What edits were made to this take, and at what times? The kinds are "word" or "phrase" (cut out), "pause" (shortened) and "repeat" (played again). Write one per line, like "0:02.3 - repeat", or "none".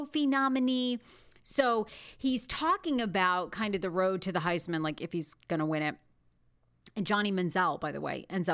none